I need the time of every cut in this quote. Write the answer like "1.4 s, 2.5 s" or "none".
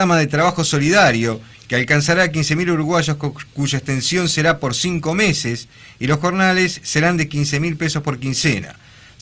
none

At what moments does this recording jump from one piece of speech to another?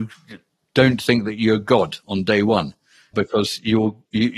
3.1 s

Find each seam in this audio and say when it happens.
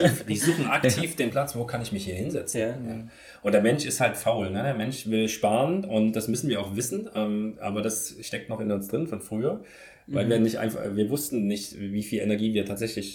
none

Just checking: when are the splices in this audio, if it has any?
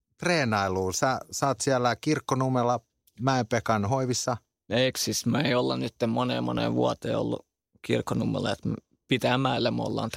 none

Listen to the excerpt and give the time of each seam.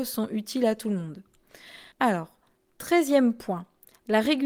1.9 s

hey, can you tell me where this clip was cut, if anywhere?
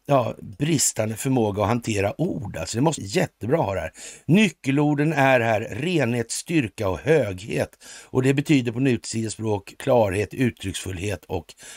3.0 s, 9.7 s

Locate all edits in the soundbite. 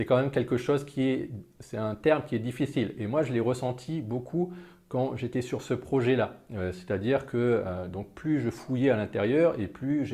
none

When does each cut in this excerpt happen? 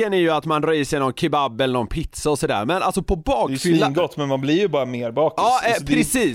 none

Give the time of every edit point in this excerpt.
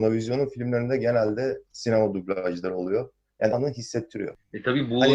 1.7 s, 3.5 s

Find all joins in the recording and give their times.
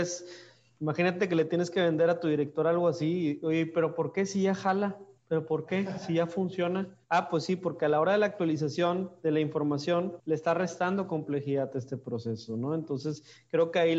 5.2 s, 7.0 s, 10.2 s

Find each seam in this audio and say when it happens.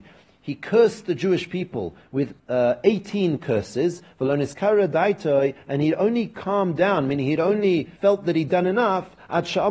2.4 s, 8.0 s

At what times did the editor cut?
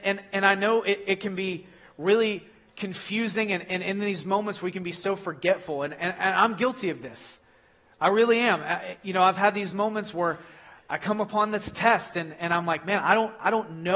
none

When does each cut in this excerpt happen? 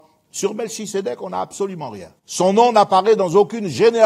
2.2 s

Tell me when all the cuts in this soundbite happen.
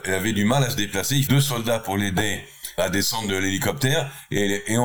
1.3 s, 2.8 s

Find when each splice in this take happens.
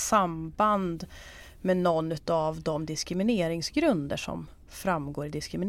none

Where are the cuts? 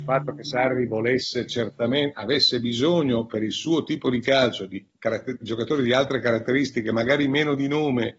4.9 s

